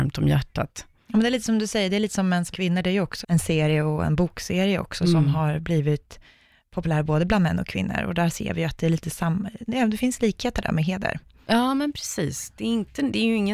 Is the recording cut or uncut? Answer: cut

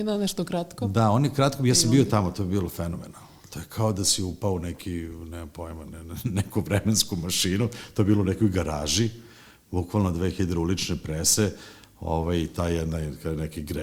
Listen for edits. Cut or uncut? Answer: uncut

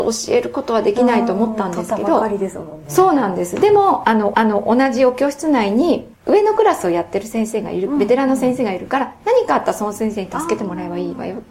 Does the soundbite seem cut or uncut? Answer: cut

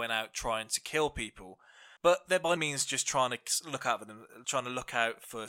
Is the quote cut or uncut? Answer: cut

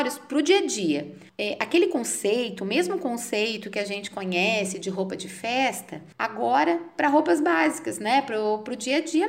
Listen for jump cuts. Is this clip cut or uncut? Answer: uncut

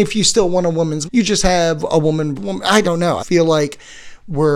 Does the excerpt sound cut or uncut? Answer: cut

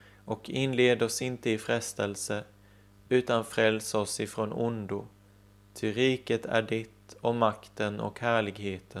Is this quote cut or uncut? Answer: uncut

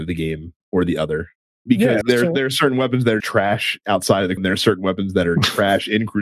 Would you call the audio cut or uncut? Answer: cut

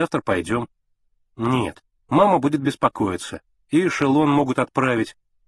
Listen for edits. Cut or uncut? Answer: uncut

